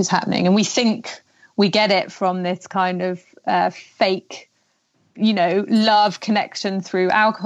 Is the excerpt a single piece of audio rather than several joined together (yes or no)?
yes